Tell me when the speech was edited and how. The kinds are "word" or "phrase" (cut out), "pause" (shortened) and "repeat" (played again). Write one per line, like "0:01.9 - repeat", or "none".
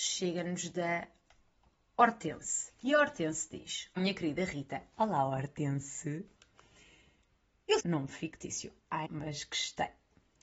0:02.8 - pause
0:04.0 - word
0:07.8 - phrase
0:09.0 - word